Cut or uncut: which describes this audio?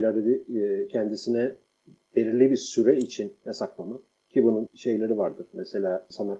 cut